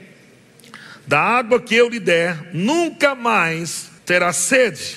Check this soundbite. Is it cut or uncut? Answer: cut